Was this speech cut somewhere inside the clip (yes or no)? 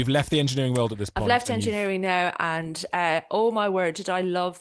no